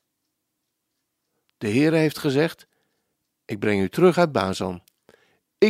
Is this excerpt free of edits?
yes; 0 cuts

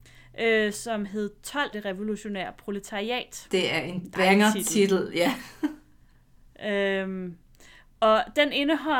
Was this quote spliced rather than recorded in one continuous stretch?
yes; 1 cut; at 1.7 s

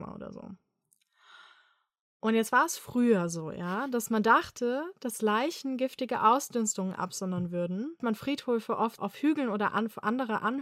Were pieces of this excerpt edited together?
yes; 2 cuts; at 8.0 s, 9.0 s

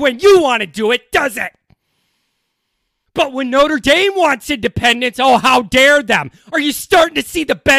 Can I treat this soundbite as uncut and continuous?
yes; 0 cuts

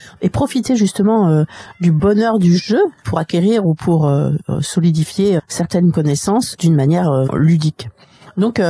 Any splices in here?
yes; 4 cuts; at 3.0 s, 5.4 s, 6.5 s, 7.3 s

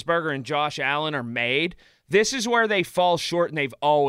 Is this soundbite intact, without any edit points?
yes; 0 cuts

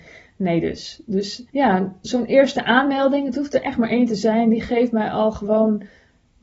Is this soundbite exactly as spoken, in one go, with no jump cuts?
no; 1 cut; at 1.5 s

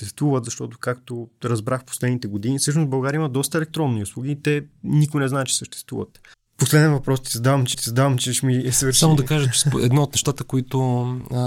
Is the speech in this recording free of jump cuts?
no; 2 cuts; at 6.3 s, 7.7 s

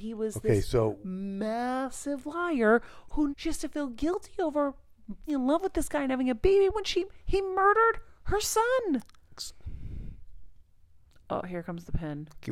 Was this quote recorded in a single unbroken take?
no; 2 cuts; at 3.3 s, 5.3 s

